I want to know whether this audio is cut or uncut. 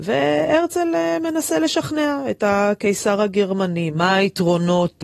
uncut